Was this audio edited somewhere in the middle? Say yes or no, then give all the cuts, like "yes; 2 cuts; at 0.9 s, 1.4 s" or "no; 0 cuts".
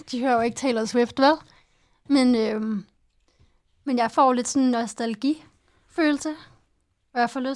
no; 0 cuts